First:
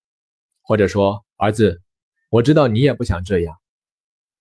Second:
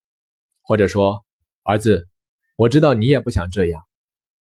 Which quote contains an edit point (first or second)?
first